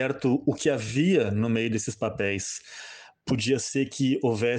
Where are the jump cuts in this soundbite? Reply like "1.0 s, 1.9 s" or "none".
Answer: none